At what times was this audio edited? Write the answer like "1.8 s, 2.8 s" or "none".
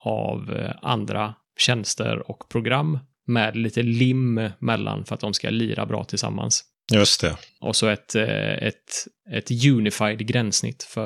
none